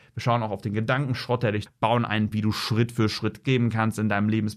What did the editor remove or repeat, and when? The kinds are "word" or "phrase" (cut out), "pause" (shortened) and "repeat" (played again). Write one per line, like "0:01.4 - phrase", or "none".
0:01.7 - word
0:02.3 - word
0:03.4 - word